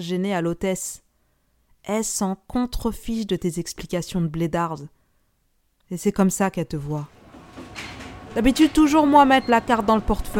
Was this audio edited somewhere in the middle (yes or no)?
no